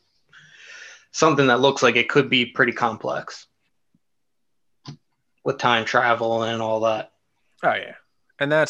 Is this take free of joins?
yes; 0 cuts

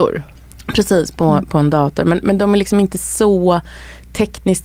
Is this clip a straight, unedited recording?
yes; 0 cuts

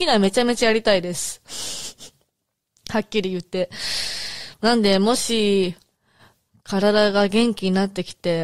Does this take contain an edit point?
no; 0 cuts

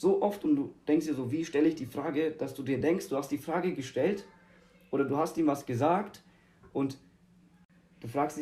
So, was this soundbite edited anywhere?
no; 0 cuts

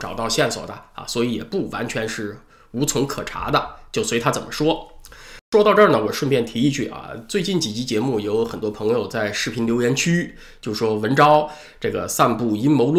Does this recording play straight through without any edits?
yes; 0 cuts

